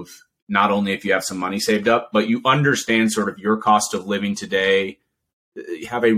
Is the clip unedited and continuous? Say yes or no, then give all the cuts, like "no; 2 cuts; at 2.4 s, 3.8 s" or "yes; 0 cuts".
yes; 0 cuts